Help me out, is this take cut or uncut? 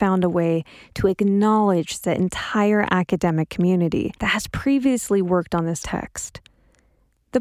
cut